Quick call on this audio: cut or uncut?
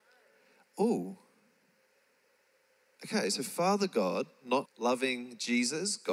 cut